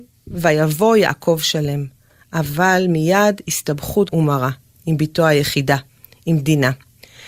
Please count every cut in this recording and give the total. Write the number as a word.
one